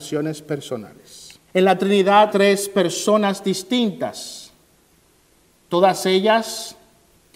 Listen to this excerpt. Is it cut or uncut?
cut